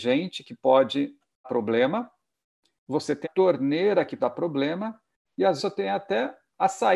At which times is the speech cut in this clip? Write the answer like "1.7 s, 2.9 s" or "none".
1.4 s, 3.2 s, 4.2 s, 5.6 s